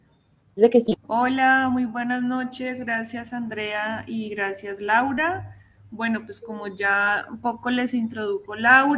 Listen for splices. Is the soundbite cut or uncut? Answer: cut